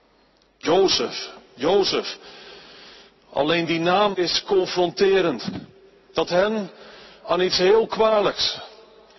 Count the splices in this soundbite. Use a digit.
2